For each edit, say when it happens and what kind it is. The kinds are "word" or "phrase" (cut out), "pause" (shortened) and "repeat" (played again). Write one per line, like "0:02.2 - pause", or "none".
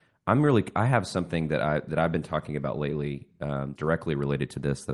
0:03.8 - word